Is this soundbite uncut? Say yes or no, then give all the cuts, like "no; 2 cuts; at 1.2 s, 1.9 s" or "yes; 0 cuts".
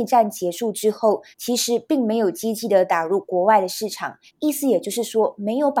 no; 2 cuts; at 1.3 s, 4.3 s